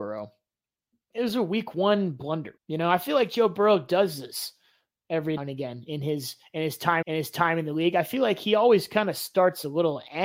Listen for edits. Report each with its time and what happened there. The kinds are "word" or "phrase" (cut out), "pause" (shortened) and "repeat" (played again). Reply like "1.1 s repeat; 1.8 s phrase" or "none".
2.6 s pause; 5.4 s word; 7.0 s repeat